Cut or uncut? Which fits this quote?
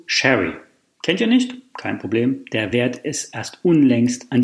uncut